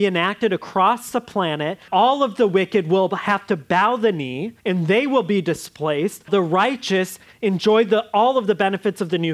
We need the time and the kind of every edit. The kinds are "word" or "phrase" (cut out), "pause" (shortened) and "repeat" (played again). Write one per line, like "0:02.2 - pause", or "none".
0:01.9 - word
0:04.6 - pause
0:06.3 - word